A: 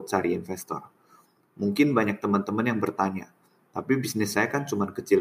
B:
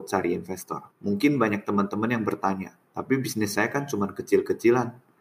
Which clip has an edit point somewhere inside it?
B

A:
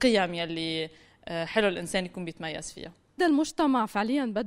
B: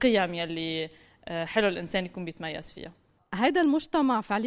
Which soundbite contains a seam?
A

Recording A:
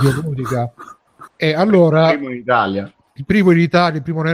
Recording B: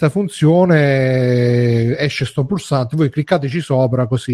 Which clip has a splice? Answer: A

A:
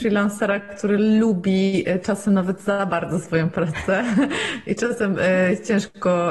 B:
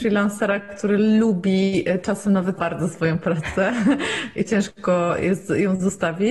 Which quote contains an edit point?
B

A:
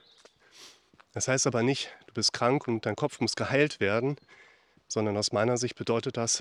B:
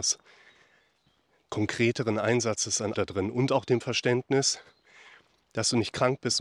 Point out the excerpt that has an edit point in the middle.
B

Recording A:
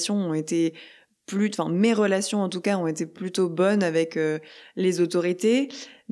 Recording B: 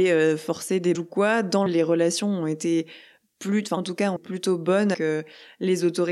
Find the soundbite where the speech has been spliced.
B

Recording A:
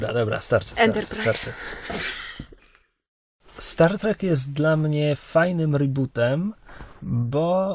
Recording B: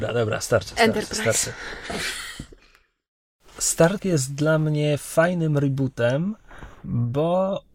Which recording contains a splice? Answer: B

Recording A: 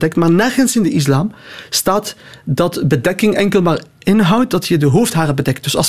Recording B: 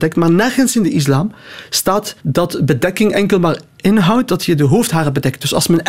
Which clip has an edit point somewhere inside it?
B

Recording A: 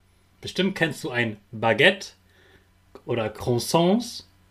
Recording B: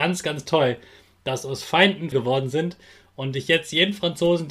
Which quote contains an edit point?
B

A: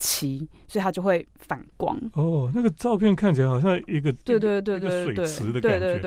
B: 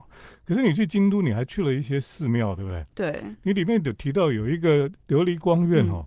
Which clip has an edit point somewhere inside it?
A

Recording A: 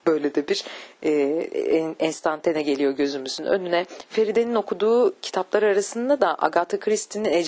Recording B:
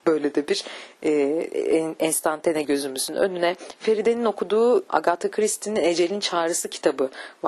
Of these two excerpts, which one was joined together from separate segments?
B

